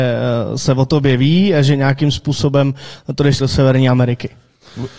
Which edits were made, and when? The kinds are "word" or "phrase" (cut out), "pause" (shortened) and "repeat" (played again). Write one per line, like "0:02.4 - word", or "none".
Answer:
0:03.4 - word